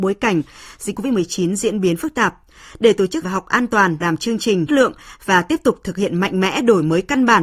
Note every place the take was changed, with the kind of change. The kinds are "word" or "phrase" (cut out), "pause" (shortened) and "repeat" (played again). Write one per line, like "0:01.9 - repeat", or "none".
0:00.9 - word
0:03.2 - word
0:04.0 - word
0:04.7 - word